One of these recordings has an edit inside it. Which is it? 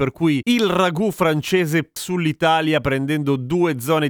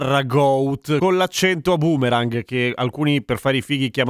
first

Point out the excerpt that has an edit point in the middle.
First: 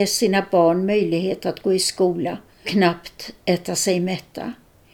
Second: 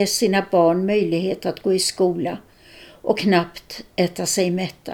first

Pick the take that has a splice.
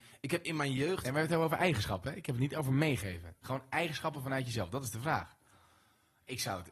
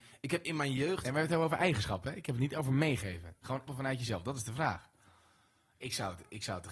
second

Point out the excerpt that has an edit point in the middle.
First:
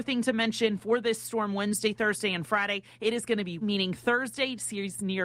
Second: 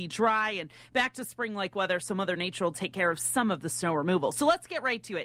first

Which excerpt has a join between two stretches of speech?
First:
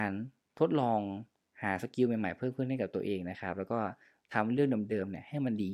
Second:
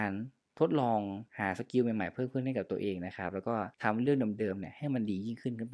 second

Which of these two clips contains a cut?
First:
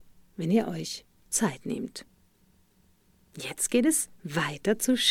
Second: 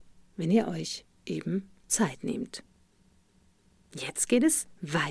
first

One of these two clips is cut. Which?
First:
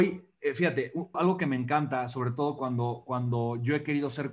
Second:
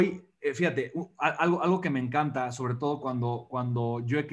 first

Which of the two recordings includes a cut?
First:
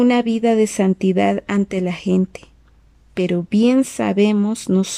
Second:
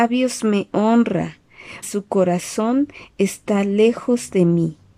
second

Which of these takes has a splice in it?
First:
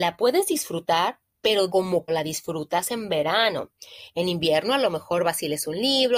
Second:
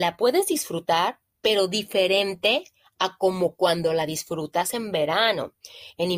first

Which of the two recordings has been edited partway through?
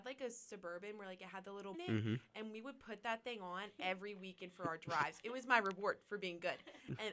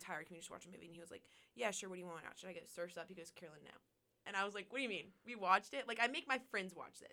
first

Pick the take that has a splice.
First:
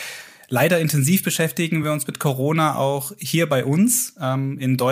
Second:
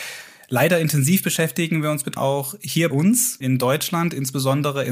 second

